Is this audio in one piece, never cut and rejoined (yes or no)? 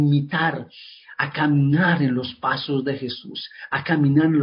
yes